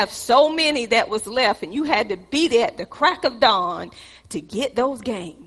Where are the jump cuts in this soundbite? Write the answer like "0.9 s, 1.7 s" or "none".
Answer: none